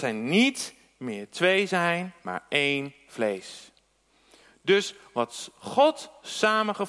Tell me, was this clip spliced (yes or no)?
no